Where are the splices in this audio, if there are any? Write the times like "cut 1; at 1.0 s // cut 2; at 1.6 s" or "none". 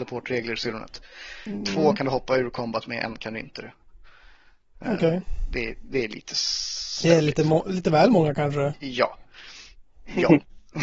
none